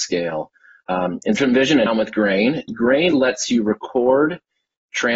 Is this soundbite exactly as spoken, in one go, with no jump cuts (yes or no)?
no